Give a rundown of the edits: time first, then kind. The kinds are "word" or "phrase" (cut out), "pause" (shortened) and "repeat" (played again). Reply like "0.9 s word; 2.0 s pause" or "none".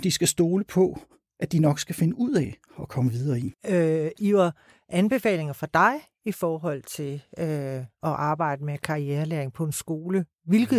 1.2 s pause; 3.6 s pause

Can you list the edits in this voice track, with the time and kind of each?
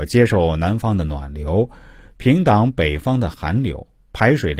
none

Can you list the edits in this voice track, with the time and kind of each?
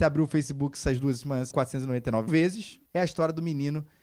1.5 s word; 2.3 s word; 2.9 s pause

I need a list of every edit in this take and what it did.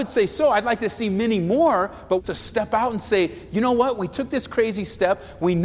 2.2 s word

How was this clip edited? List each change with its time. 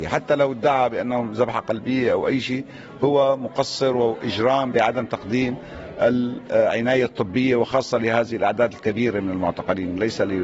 none

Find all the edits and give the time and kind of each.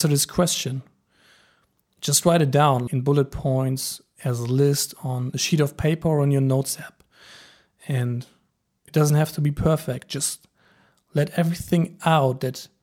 2.9 s word

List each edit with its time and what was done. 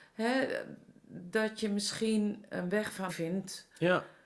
2.5 s word; 3.1 s word

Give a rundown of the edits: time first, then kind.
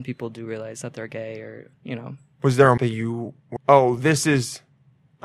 1.7 s word; 2.8 s word; 3.6 s word

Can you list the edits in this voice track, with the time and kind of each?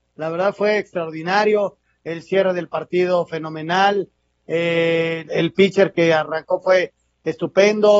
5.3 s word

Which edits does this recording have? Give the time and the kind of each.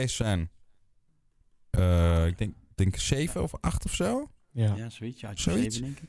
none

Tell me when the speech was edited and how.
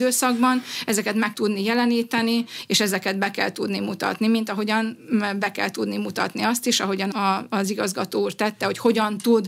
1.3 s word; 7.1 s word

